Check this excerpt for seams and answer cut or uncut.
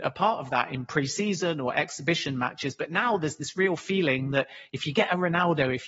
uncut